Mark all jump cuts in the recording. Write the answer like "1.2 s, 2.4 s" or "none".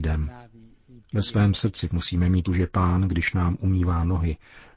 1.9 s, 2.5 s